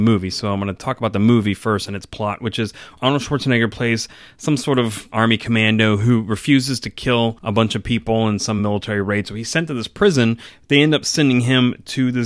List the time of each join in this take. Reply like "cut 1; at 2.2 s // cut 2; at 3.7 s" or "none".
none